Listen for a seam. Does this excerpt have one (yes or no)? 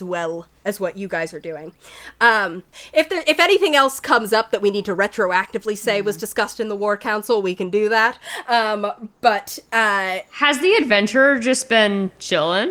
no